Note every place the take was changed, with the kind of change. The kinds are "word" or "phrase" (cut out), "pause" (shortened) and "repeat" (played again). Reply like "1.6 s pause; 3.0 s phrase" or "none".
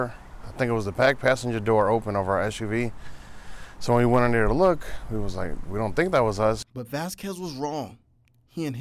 6.7 s pause

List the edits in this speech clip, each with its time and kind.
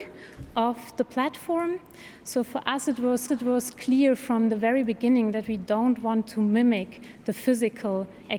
3.3 s repeat

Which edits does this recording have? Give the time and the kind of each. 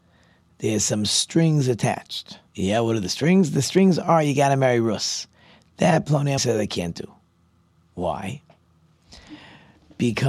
2.5 s pause; 6.4 s word

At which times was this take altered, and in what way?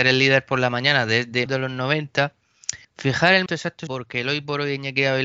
1.5 s word; 2.8 s pause; 3.5 s word; 3.9 s phrase

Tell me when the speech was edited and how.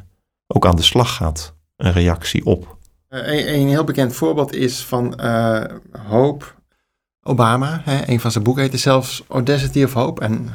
none

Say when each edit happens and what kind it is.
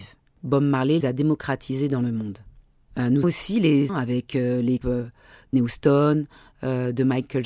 1.0 s word; 3.2 s word; 3.9 s word; 4.8 s word; 5.5 s word

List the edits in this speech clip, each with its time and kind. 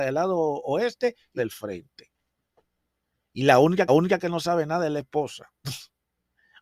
1.4 s word; 3.9 s repeat

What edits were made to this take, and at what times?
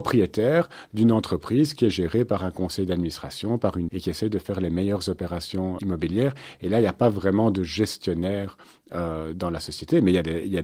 3.9 s word; 5.8 s word

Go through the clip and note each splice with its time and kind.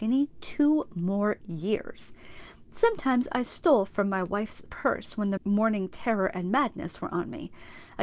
4.7 s word; 5.4 s word

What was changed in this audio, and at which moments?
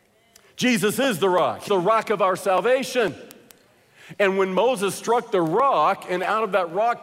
1.7 s word

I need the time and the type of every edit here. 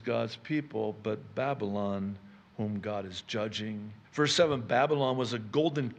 4.0 s pause

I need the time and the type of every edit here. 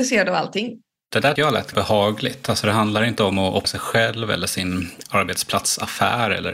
1.4 s word; 1.7 s word; 3.6 s word

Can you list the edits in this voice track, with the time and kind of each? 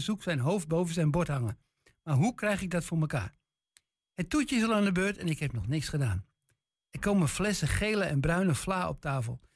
none

